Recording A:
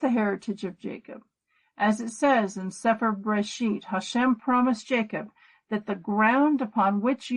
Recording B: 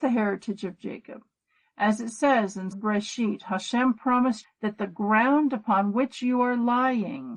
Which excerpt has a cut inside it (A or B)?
B